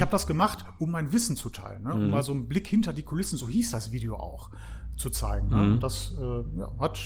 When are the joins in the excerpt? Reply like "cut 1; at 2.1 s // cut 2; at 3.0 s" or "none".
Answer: none